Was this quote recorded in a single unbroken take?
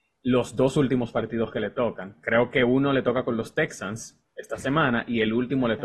yes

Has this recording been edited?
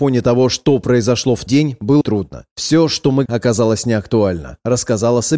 yes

